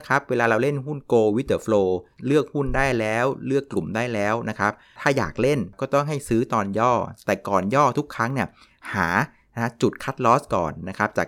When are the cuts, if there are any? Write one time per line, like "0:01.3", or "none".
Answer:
none